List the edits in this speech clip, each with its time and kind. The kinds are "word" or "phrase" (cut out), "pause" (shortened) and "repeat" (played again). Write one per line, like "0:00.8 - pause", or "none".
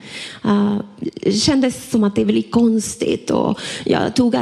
none